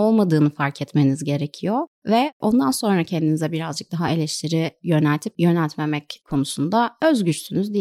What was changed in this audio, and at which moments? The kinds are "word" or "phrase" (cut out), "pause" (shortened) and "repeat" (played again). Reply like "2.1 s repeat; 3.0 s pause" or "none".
none